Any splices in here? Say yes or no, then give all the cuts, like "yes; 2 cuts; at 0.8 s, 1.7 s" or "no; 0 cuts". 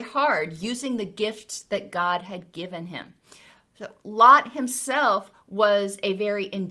no; 0 cuts